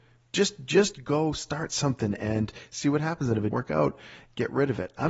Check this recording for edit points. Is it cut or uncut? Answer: cut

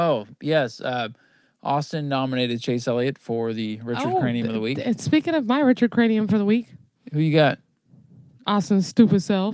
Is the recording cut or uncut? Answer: uncut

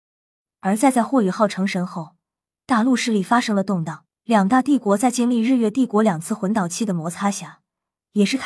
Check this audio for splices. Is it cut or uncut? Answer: cut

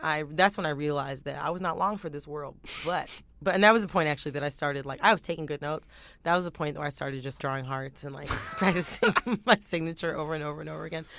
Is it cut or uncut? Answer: cut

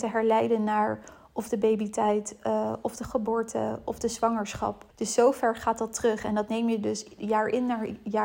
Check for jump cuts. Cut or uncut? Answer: cut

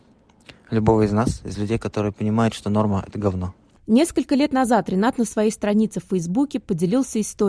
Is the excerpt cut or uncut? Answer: uncut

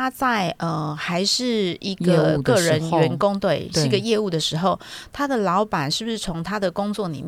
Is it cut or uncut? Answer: uncut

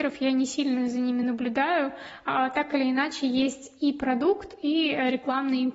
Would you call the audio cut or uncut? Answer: uncut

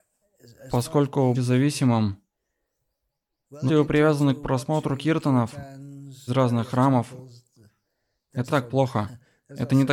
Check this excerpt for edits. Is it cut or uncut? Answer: cut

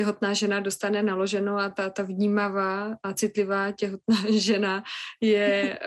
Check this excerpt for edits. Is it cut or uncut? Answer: uncut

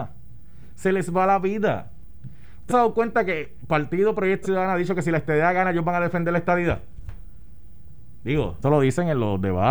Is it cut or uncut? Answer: cut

